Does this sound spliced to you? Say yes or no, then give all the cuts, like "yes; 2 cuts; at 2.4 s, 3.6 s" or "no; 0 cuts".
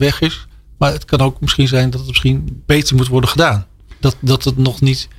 no; 0 cuts